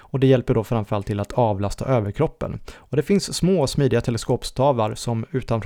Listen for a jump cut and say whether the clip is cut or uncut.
uncut